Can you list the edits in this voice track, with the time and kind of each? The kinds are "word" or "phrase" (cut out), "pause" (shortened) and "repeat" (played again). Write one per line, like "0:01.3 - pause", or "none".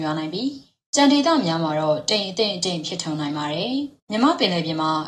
0:04.0 - pause